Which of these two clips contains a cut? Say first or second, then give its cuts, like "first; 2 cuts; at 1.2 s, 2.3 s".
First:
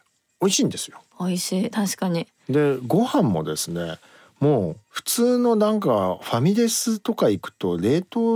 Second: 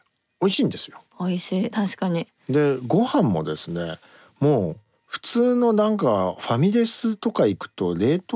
first; 1 cut; at 4.8 s